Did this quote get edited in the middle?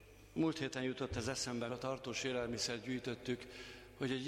yes; 1 cut; at 1.7 s

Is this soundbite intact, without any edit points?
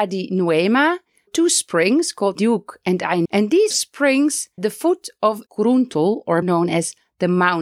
no; 7 cuts; at 1.3 s, 2.3 s, 3.2 s, 3.7 s, 4.6 s, 5.5 s, 6.4 s

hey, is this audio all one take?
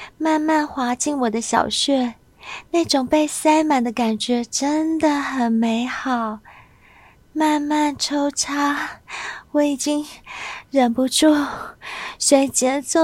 yes; 0 cuts

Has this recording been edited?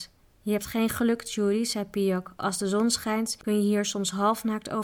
no; 0 cuts

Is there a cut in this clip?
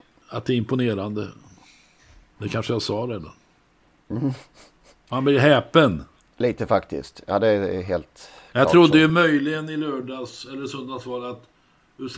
no; 0 cuts

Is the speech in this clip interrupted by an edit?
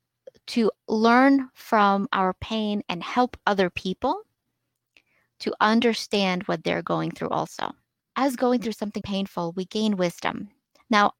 yes; 1 cut; at 9.0 s

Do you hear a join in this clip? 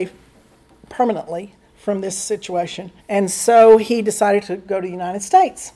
yes; 1 cut; at 3.0 s

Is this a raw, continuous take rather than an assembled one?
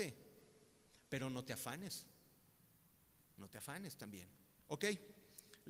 yes; 0 cuts

